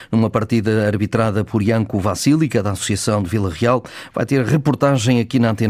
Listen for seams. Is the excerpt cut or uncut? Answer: uncut